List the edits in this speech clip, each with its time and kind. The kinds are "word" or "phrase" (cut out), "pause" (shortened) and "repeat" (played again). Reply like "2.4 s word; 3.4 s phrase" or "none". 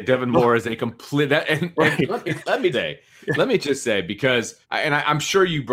2.7 s word; 4.6 s pause